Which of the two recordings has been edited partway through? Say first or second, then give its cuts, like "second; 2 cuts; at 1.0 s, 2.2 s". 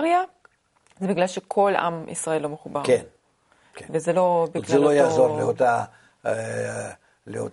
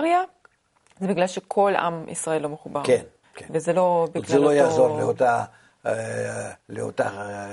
second; 2 cuts; at 3.2 s, 6.6 s